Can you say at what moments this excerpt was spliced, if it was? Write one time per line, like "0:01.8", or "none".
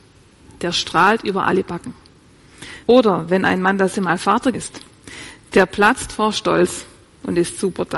0:02.8
0:03.9
0:04.5